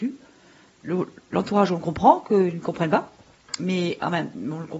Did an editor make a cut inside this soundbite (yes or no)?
no